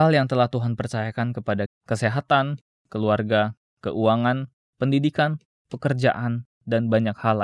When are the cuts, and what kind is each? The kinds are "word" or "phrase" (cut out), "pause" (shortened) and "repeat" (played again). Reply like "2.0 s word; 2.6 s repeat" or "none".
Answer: 1.7 s word